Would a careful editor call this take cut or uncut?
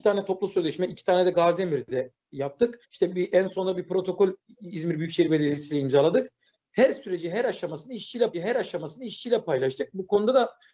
cut